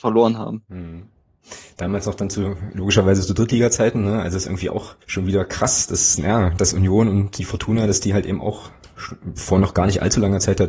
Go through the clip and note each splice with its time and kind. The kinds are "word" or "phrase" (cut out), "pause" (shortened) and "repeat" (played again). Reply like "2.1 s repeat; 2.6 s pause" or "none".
5.0 s pause